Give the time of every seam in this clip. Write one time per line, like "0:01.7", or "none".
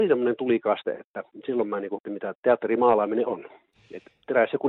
0:02.0
0:02.3
0:03.2